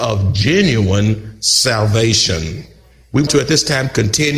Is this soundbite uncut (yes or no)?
no